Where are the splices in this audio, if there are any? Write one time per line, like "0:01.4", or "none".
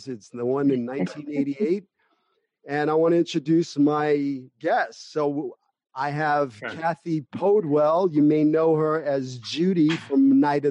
none